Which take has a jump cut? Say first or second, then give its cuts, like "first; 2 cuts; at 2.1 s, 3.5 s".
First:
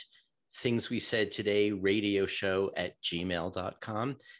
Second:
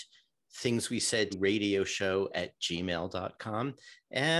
second; 1 cut; at 1.3 s